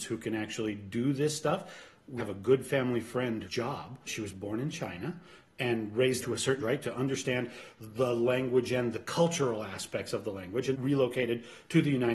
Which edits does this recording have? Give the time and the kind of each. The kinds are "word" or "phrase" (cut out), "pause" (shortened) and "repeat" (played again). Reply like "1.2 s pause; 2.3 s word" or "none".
2.2 s word; 3.5 s word; 4.1 s word; 6.2 s word; 6.6 s word; 10.7 s word